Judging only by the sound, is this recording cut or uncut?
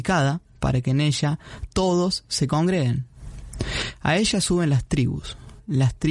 uncut